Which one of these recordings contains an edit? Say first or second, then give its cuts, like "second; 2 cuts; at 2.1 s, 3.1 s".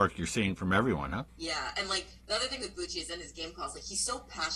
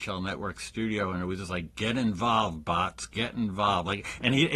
first; 1 cut; at 1.3 s